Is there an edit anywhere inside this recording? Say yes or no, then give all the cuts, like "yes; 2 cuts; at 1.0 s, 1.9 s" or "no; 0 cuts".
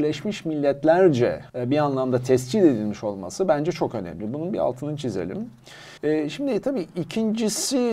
yes; 2 cuts; at 1.5 s, 6.0 s